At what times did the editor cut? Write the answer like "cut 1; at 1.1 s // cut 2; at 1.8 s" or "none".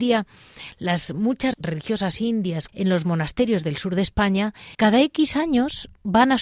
cut 1; at 1.5 s // cut 2; at 2.7 s // cut 3; at 4.7 s